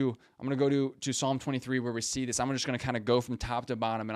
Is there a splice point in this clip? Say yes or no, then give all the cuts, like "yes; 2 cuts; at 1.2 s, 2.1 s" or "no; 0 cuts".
no; 0 cuts